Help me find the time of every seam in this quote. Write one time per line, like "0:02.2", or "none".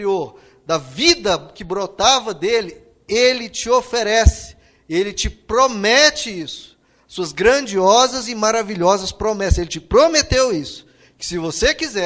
none